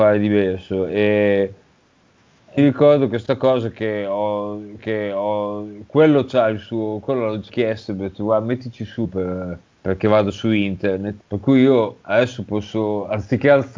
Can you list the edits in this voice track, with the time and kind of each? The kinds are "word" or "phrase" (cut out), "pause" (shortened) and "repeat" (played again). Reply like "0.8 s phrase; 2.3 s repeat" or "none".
2.6 s word; 4.8 s repeat; 7.5 s word; 9.0 s phrase; 9.7 s pause; 11.2 s pause; 12.0 s pause

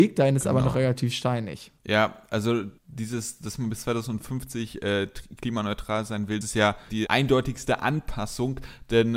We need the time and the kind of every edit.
1.8 s pause; 2.8 s pause; 6.4 s word

